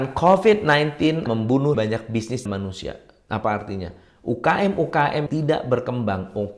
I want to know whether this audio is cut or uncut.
cut